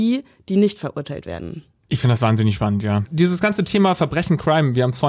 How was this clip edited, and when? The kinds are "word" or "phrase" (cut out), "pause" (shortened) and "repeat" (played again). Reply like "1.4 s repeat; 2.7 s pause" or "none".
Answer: none